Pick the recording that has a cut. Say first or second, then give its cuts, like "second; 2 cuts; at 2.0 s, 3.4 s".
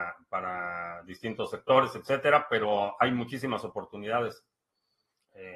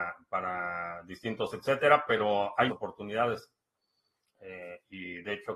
second; 2 cuts; at 1.5 s, 2.7 s